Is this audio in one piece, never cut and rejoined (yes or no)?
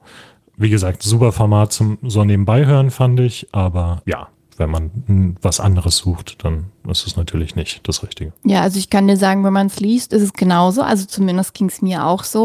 no